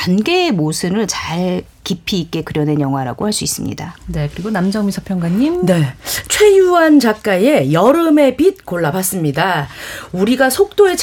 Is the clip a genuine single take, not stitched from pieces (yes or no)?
yes